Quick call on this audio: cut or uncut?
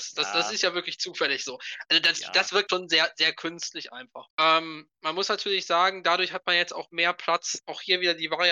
cut